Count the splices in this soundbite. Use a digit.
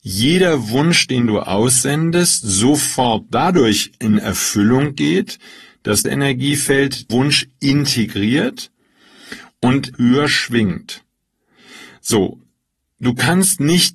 3